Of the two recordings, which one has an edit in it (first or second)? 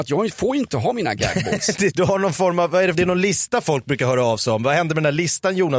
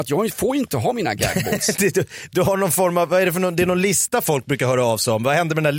first